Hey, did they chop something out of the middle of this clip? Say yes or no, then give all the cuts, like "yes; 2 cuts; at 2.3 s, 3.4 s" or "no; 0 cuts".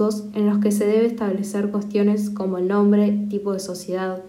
no; 0 cuts